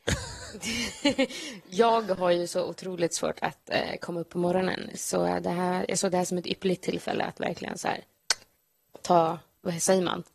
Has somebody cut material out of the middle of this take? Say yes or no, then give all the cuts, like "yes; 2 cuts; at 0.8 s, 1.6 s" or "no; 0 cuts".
no; 0 cuts